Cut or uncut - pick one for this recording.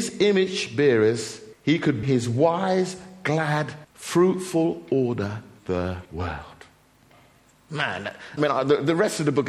cut